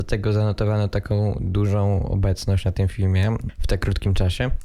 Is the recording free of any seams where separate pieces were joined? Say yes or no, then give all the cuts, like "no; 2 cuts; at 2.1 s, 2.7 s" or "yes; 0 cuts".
yes; 0 cuts